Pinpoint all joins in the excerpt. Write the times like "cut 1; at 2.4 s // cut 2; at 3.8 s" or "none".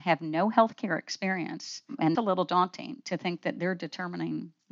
cut 1; at 2.1 s